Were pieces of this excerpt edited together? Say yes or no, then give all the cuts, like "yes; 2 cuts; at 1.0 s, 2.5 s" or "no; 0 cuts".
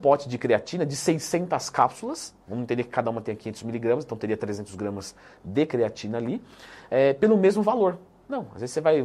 no; 0 cuts